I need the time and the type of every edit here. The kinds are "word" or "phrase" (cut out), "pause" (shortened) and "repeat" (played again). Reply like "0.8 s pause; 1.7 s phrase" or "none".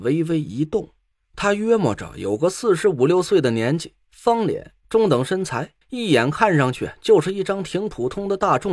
1.1 s pause; 5.8 s pause